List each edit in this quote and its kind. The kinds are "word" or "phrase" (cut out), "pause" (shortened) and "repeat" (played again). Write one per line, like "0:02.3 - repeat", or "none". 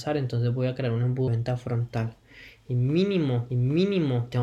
0:01.3 - word
0:03.5 - repeat